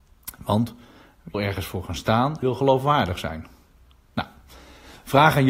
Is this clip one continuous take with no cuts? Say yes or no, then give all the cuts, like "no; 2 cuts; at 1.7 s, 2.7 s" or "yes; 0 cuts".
no; 2 cuts; at 1.3 s, 2.4 s